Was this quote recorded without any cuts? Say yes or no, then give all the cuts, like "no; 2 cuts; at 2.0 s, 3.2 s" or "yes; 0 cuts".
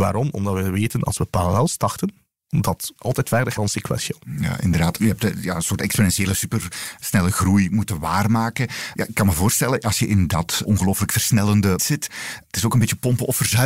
no; 3 cuts; at 3.0 s, 3.6 s, 11.8 s